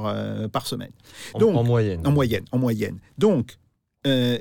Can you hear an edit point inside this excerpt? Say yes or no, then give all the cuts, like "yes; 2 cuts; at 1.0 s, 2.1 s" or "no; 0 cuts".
no; 0 cuts